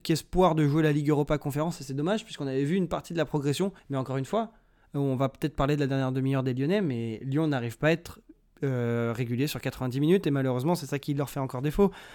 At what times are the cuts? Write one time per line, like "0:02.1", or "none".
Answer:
0:03.8